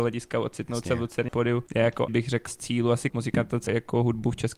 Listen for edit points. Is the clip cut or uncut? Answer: cut